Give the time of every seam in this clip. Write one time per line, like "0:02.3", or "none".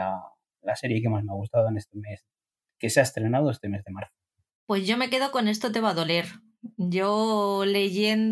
none